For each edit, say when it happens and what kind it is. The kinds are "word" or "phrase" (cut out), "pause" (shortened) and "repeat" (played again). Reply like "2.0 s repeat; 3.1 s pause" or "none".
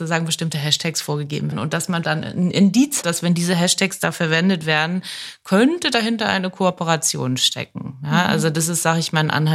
1.5 s word; 2.0 s word; 3.0 s word